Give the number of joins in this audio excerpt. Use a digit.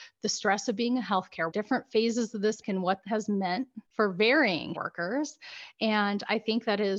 5